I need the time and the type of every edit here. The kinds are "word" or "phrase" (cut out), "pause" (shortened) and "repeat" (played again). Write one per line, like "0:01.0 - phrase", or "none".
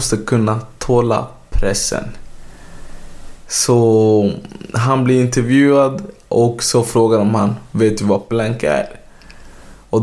0:08.3 - word

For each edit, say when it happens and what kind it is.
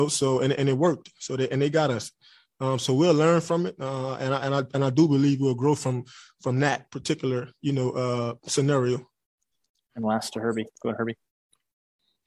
none

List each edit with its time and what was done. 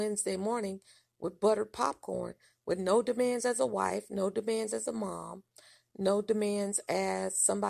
none

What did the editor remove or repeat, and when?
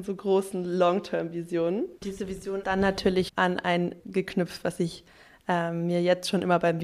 0:02.0 - pause
0:02.6 - word
0:03.3 - word
0:04.0 - word

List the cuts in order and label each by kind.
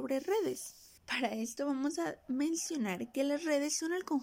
0:01.0 - pause

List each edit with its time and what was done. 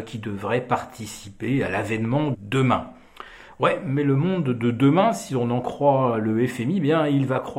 0:02.3 - phrase

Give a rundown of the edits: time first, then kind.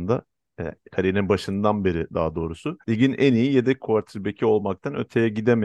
0:02.8 - pause

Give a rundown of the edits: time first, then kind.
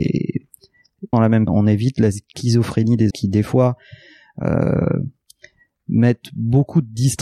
0:01.1 - phrase
0:01.5 - word
0:03.1 - word

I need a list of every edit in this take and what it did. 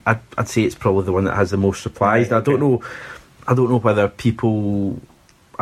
none

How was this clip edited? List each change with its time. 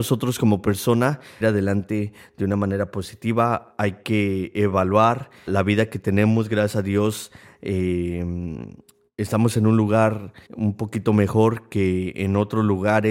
0:01.4 - phrase
0:05.5 - word
0:10.5 - pause

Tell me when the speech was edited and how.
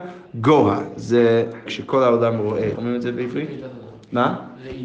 0:01.7 - word
0:02.7 - word

